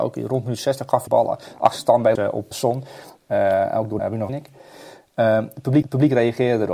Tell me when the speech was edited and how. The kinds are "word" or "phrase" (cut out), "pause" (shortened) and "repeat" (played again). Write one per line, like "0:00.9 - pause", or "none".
0:01.1 - phrase
0:02.2 - word
0:02.5 - word
0:04.0 - phrase
0:04.3 - phrase
0:05.8 - repeat